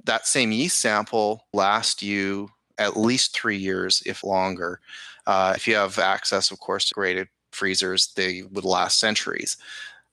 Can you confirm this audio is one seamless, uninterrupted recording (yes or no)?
no